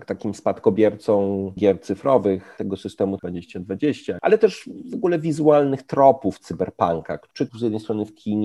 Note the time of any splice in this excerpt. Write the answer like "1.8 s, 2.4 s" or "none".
1.6 s, 3.2 s, 7.5 s